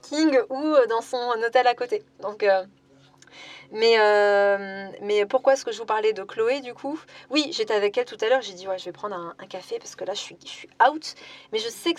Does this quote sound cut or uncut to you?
uncut